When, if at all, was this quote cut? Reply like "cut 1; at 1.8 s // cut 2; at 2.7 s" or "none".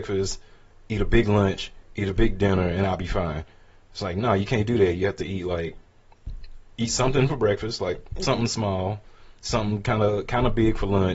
none